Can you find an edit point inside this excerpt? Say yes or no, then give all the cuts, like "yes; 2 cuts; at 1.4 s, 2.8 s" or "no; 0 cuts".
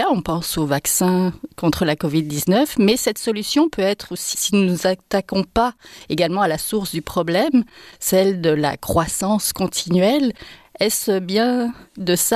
yes; 1 cut; at 4.3 s